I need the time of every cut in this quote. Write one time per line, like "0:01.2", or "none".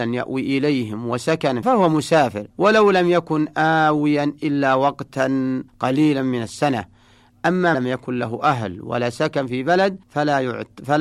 0:01.6
0:02.5
0:05.7
0:07.7
0:10.0